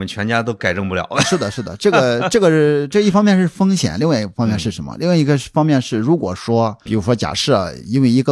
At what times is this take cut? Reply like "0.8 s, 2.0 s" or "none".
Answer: 6.9 s